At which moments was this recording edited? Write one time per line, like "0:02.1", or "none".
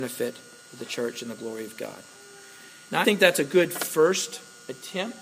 0:03.0